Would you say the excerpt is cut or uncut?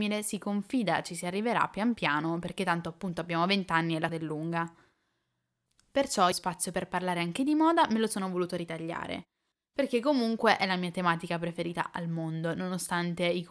cut